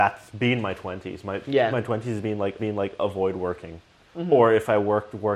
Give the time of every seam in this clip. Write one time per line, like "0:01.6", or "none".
0:02.6